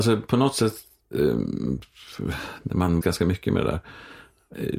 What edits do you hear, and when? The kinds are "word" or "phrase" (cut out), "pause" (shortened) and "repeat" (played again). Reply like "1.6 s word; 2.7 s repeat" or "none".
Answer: 3.0 s word